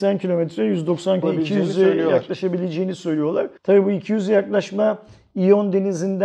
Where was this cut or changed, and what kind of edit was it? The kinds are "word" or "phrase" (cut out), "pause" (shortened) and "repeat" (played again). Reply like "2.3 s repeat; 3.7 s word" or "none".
1.2 s phrase; 3.6 s pause